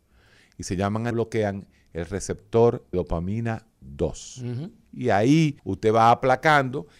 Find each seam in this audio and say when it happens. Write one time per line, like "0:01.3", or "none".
0:01.1
0:02.9
0:04.9
0:05.6